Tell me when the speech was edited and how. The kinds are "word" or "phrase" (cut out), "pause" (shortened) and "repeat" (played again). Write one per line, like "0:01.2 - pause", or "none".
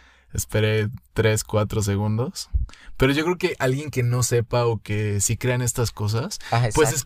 0:01.0 - pause